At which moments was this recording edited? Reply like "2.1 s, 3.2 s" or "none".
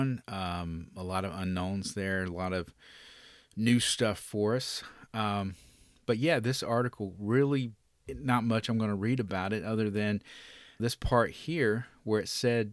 8.0 s, 10.8 s